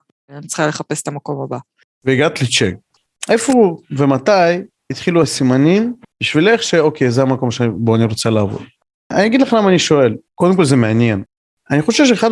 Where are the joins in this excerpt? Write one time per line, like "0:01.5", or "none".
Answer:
none